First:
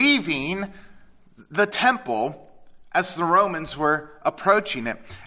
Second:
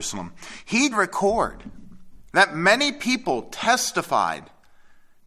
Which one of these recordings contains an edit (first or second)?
second